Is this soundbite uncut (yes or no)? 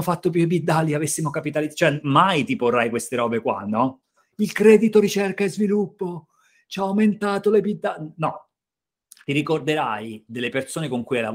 yes